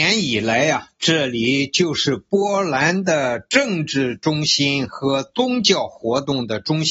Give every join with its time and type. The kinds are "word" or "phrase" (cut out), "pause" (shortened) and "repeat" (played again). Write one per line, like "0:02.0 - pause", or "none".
none